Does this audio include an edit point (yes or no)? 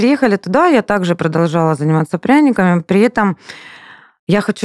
no